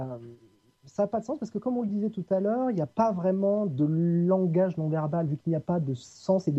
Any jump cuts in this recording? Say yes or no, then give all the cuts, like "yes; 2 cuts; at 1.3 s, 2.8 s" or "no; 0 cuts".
no; 0 cuts